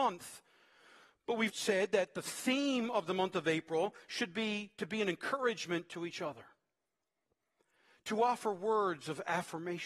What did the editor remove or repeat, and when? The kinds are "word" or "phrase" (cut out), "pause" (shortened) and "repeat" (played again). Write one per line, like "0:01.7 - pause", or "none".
0:01.5 - word